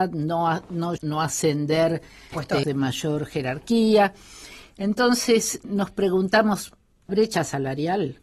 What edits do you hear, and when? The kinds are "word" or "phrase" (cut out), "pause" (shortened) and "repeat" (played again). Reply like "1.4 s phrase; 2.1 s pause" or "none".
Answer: 1.0 s word; 2.3 s word; 2.6 s word; 5.6 s word; 7.1 s word